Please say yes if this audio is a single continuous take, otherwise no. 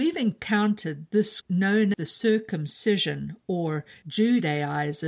no